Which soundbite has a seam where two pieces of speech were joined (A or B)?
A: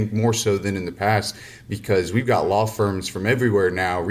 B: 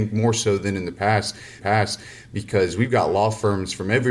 B